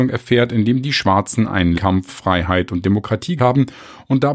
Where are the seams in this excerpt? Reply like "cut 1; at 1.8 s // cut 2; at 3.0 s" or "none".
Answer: cut 1; at 1.7 s // cut 2; at 2.1 s // cut 3; at 3.4 s